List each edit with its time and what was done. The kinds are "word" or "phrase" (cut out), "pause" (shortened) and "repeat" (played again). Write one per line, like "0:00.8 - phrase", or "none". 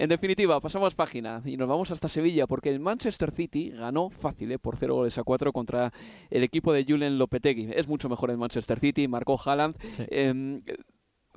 none